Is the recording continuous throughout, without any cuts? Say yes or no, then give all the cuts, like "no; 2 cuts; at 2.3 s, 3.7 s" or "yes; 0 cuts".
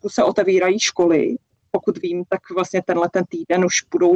yes; 0 cuts